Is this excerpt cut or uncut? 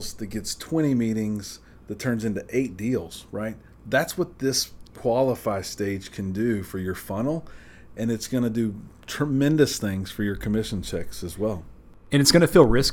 uncut